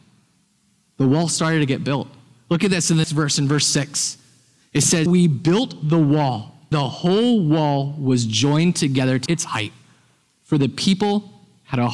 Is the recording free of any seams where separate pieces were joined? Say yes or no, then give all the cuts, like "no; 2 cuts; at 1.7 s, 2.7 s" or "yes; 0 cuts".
no; 4 cuts; at 3.0 s, 5.1 s, 6.7 s, 9.3 s